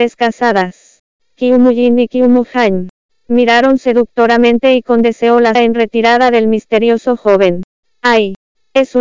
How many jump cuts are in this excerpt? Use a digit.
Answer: 1